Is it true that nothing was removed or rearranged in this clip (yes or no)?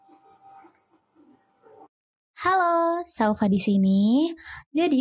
yes